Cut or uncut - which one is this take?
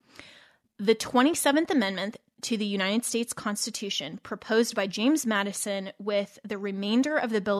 uncut